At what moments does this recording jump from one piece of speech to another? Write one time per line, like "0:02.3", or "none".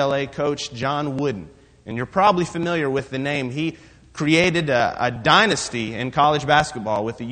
none